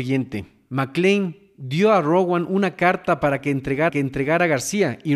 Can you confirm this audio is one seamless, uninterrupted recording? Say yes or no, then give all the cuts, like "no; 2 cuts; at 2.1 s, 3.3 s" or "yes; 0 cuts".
no; 1 cut; at 3.9 s